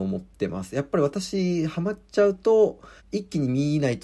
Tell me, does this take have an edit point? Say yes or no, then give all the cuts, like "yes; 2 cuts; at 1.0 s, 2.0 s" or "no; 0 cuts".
yes; 1 cut; at 3.0 s